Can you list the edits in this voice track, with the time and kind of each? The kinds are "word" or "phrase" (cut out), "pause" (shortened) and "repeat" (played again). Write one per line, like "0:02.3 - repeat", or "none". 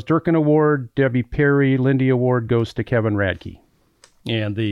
none